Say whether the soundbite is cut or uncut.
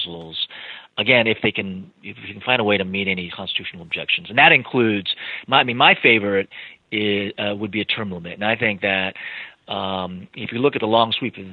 cut